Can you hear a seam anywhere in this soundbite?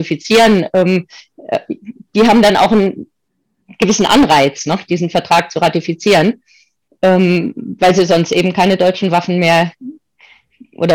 no; 0 cuts

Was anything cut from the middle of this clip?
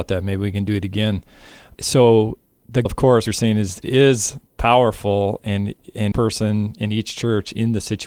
yes; 5 cuts; at 2.9 s, 3.3 s, 3.8 s, 4.5 s, 6.1 s

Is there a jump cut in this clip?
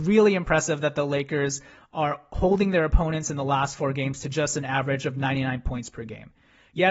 no; 0 cuts

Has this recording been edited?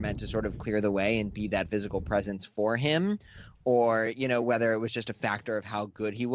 no; 0 cuts

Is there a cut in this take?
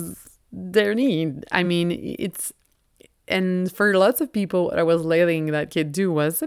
no; 0 cuts

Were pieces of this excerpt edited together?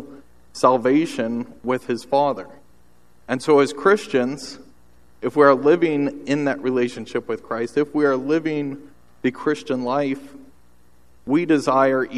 no; 0 cuts

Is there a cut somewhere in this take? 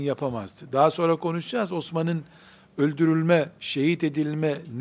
no; 0 cuts

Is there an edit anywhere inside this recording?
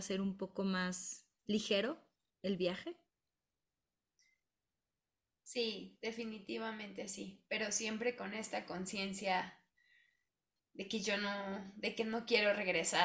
no; 0 cuts

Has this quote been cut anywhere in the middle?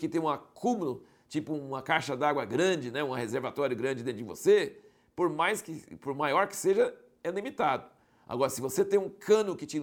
no; 0 cuts

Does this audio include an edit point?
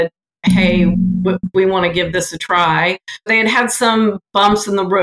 yes; 1 cut; at 3.3 s

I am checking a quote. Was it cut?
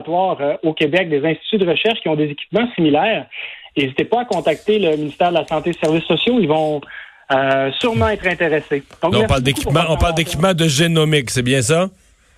no; 0 cuts

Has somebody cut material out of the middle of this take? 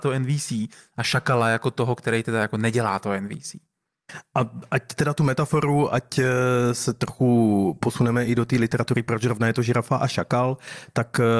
no; 0 cuts

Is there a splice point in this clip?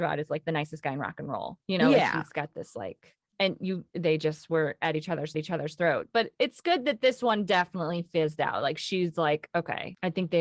yes; 2 cuts; at 3.3 s, 5.3 s

